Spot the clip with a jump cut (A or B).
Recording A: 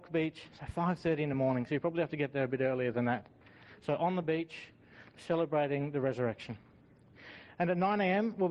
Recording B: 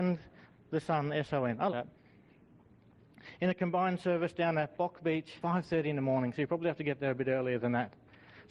B